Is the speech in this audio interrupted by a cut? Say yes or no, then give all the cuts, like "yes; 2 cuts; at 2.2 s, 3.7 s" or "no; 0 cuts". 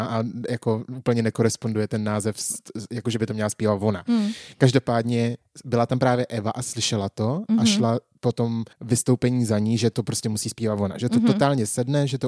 yes; 1 cut; at 8.7 s